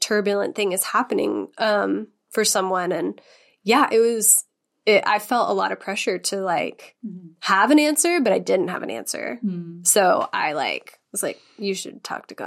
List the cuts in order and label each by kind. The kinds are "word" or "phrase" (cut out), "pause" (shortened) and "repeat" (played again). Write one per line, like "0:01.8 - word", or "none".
none